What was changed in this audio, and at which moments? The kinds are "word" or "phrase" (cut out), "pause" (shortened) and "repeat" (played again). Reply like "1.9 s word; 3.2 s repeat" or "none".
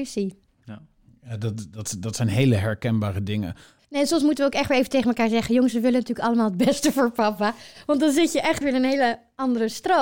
8.6 s word